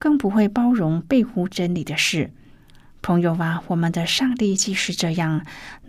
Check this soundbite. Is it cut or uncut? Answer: uncut